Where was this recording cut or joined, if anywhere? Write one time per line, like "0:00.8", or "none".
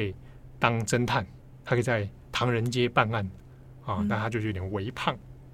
none